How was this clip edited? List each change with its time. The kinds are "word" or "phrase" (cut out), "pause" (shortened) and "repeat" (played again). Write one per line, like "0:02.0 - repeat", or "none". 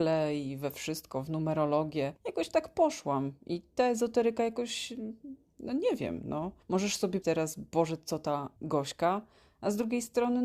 0:02.2 - pause
0:06.6 - pause
0:07.2 - word
0:08.6 - pause